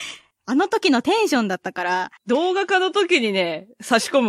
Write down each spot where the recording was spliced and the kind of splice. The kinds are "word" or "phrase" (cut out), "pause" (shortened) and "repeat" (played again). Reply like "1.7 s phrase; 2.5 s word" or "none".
2.2 s pause